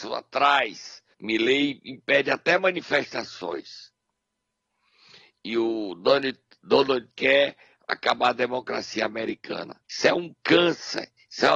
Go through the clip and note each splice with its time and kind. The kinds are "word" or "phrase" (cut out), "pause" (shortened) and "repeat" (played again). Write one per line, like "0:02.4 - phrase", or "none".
0:01.1 - pause
0:07.1 - word
0:09.8 - pause